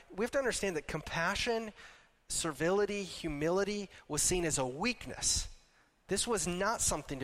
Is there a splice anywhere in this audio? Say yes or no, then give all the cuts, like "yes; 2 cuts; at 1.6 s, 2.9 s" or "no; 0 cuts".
no; 0 cuts